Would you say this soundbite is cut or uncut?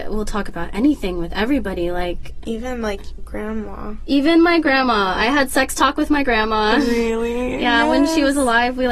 cut